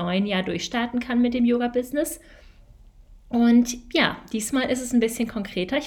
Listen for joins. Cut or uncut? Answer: uncut